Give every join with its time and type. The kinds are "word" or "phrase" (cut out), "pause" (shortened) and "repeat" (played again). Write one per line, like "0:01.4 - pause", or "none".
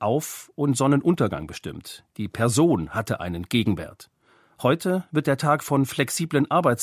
none